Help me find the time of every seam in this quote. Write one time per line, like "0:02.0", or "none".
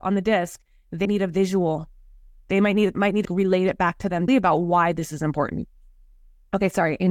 0:01.0
0:02.9
0:03.2
0:04.3